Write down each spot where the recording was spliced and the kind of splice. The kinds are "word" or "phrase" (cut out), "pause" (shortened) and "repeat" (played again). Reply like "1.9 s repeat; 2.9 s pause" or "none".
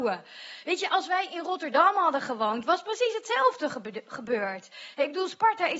none